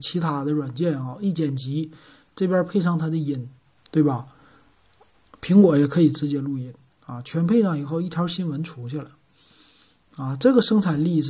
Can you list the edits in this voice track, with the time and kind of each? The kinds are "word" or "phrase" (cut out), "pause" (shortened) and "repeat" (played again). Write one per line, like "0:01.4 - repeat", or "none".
none